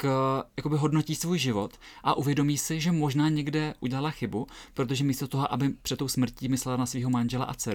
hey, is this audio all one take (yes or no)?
no